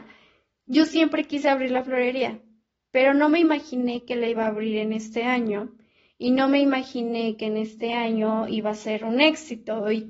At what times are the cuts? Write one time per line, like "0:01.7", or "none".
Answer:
none